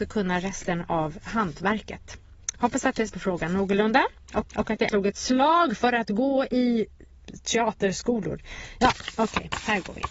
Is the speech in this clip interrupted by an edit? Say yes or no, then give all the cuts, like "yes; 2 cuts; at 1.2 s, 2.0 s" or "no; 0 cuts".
yes; 3 cuts; at 3.1 s, 4.4 s, 4.9 s